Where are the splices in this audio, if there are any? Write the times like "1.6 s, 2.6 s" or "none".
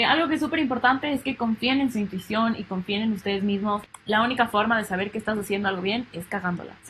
none